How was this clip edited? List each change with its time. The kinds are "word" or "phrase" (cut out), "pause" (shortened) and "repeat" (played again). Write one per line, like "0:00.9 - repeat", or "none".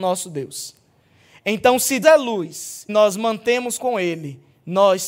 0:02.0 - word
0:02.9 - word
0:03.8 - word